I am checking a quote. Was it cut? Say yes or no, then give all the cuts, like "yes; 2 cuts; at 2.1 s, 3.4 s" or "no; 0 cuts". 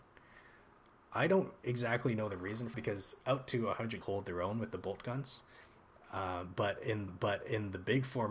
yes; 3 cuts; at 2.7 s, 4.0 s, 7.1 s